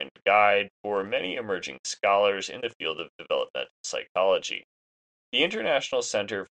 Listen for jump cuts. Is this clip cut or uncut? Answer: uncut